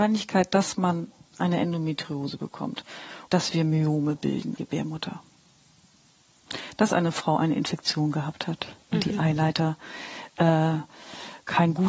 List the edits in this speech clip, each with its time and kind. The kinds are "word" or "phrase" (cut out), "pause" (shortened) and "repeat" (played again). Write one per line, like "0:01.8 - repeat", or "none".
0:03.3 - word
0:04.6 - phrase
0:08.8 - pause

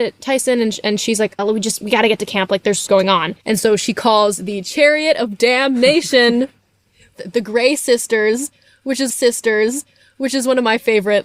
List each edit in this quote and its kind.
0:01.4 - word
0:02.9 - word
0:03.4 - pause
0:07.1 - word
0:09.1 - repeat

